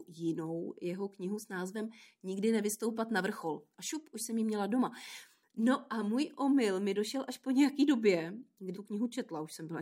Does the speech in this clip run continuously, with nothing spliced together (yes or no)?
no